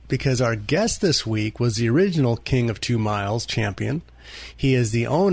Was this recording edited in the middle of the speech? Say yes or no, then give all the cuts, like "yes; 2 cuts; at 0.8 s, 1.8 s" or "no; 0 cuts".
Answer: no; 0 cuts